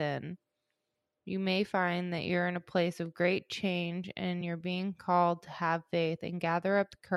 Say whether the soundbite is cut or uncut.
uncut